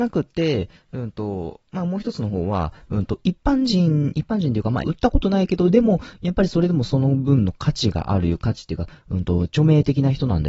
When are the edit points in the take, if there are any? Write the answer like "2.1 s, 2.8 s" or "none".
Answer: 1.7 s, 4.8 s